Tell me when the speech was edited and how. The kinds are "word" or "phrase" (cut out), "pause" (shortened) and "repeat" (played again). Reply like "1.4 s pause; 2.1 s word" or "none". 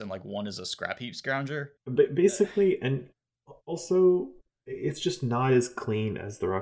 1.8 s pause